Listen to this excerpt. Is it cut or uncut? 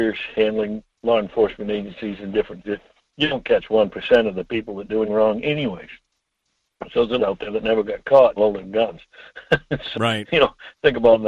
cut